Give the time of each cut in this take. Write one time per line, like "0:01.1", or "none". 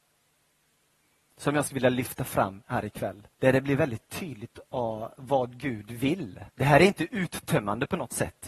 0:03.3
0:06.5

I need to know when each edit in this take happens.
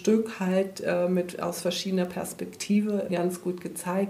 0:03.1

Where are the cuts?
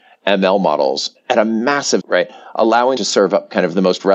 0:02.0
0:03.0

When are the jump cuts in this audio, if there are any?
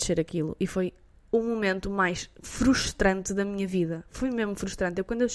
none

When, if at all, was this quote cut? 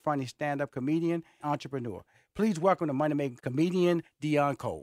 0:01.4
0:03.4

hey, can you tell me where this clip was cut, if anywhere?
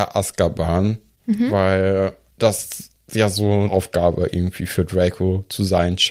0:03.7

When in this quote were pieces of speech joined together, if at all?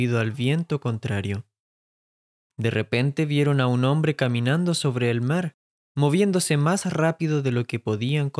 none

